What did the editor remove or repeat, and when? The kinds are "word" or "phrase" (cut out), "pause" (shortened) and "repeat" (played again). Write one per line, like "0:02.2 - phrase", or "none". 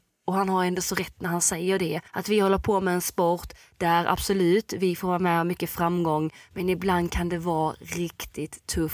0:02.1 - pause